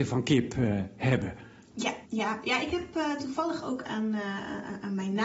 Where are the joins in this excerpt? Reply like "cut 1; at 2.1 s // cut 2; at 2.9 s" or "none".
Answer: cut 1; at 2.1 s